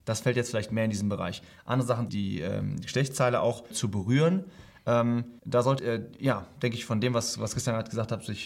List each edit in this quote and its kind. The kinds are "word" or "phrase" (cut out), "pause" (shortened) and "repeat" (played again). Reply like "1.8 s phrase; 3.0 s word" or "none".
2.1 s phrase; 3.7 s word; 5.4 s pause; 5.8 s phrase